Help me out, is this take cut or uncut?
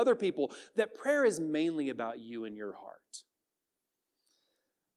uncut